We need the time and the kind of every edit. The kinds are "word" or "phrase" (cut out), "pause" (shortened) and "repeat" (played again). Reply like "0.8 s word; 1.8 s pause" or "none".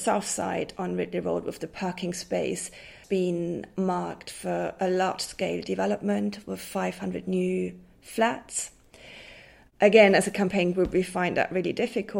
3.0 s word